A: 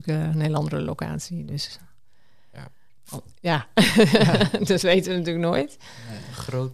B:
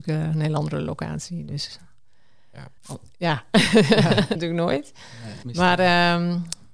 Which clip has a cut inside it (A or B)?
B